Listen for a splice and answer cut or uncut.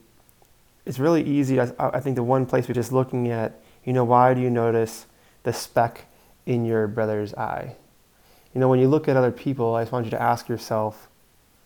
cut